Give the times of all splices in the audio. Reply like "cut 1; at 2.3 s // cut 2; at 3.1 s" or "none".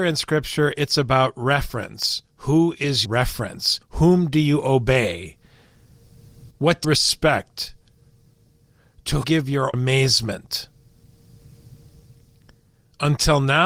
cut 1; at 3.0 s // cut 2; at 3.8 s // cut 3; at 6.5 s // cut 4; at 6.8 s // cut 5; at 9.2 s // cut 6; at 9.7 s